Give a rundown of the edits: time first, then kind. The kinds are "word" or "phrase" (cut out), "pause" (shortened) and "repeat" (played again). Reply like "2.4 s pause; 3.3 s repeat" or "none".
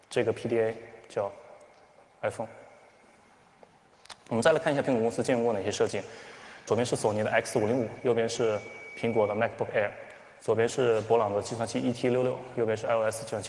none